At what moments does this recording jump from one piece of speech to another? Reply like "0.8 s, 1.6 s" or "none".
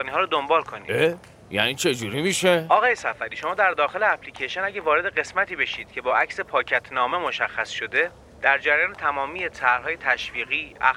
none

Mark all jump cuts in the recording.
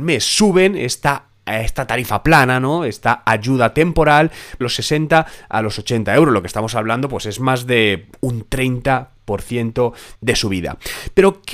4.6 s, 10.2 s

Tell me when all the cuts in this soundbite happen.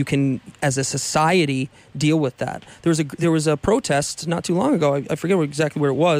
none

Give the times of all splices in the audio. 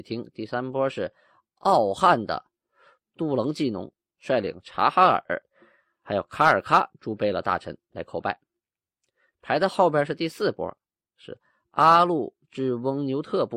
none

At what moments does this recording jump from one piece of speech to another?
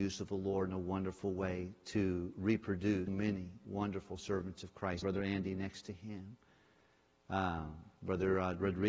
3.1 s, 5.0 s

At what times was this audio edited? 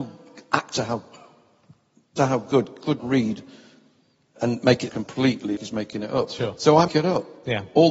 2.2 s, 3.0 s, 4.4 s, 4.9 s, 5.6 s, 6.9 s

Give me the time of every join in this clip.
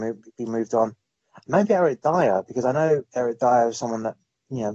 none

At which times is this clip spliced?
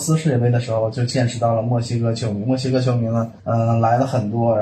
3.4 s

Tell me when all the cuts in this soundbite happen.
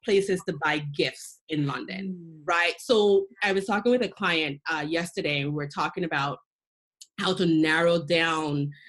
none

